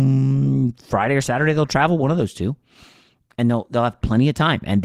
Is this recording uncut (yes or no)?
yes